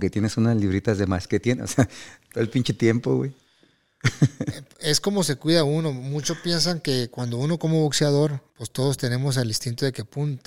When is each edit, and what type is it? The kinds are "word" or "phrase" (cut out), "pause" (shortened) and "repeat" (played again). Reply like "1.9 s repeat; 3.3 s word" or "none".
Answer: 8.5 s pause